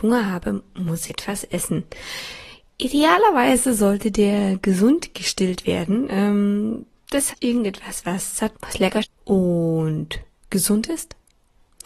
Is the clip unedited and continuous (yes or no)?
no